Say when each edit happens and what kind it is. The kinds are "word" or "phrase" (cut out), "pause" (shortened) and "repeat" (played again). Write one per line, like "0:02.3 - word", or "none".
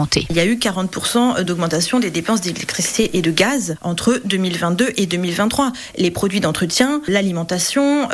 none